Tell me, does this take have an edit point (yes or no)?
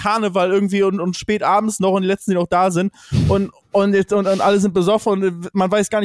no